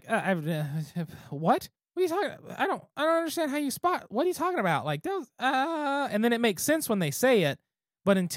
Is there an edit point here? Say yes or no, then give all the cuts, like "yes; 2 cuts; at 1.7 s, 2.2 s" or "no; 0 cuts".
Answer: yes; 1 cut; at 1.7 s